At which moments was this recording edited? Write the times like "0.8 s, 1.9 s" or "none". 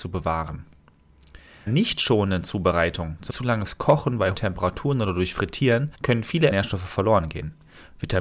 1.7 s, 3.3 s, 4.3 s, 5.9 s, 6.5 s